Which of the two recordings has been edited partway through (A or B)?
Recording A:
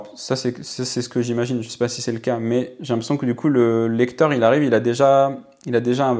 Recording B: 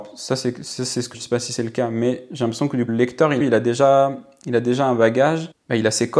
B